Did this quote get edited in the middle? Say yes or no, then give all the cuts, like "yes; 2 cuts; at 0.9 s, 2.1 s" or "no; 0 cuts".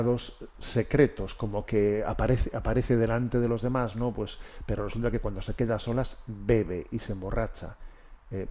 no; 0 cuts